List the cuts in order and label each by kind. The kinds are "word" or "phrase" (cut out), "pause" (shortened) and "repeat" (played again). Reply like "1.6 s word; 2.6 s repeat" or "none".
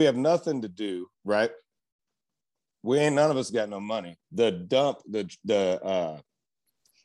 1.1 s pause; 4.2 s pause